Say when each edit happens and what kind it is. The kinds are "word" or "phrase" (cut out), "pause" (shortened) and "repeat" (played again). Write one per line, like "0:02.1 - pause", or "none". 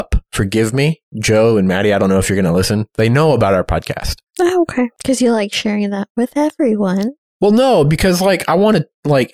none